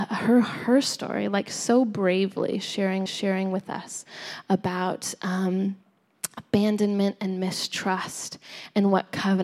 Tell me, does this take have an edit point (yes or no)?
yes